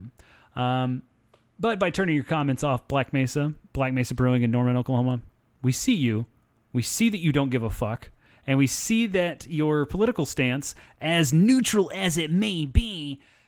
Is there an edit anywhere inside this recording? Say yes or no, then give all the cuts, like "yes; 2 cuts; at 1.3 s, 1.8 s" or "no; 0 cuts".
yes; 1 cut; at 3.6 s